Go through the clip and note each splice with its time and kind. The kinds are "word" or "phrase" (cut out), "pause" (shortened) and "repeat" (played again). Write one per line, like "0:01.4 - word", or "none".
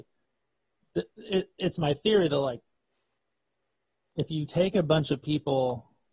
none